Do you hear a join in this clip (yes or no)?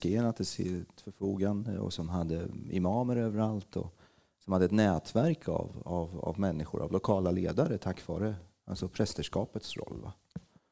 no